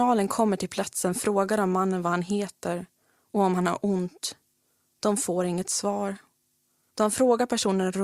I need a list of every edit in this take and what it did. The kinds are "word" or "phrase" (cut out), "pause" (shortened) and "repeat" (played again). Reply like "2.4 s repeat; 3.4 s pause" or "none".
none